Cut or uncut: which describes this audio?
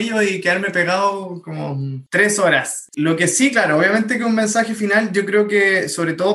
uncut